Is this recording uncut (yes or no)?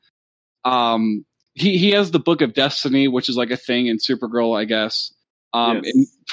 yes